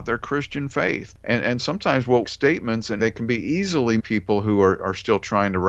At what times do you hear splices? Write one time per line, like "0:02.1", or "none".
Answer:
0:01.6
0:02.2
0:03.0
0:04.0